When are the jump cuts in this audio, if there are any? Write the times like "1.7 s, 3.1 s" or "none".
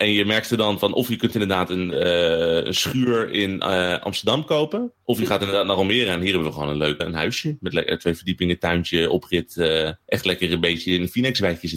5.0 s, 7.0 s, 10.0 s